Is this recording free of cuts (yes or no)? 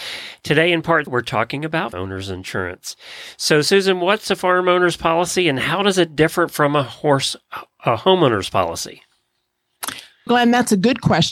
no